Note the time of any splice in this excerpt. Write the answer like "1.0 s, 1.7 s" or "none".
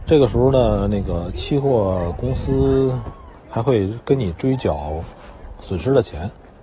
3.4 s